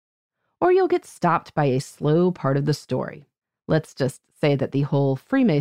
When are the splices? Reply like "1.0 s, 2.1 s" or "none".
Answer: 3.4 s